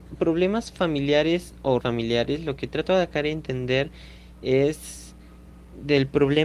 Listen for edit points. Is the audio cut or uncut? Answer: cut